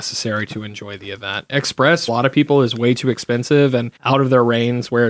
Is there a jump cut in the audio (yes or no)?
yes